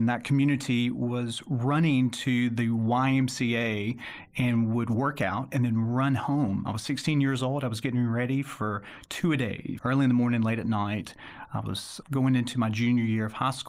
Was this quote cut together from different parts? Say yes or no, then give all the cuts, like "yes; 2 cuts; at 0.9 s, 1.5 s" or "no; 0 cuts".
yes; 2 cuts; at 9.8 s, 12.0 s